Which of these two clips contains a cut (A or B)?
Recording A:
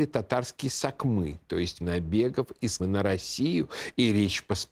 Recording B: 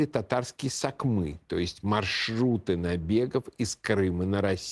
A